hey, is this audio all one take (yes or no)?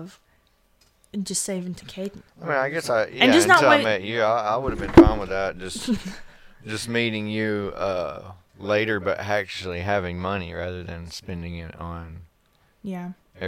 no